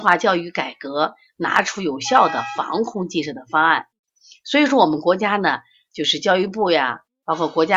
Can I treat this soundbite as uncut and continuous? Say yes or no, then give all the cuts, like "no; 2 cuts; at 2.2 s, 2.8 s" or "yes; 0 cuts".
yes; 0 cuts